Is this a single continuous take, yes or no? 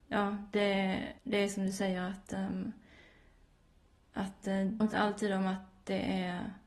no